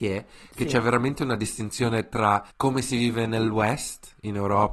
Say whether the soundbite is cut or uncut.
cut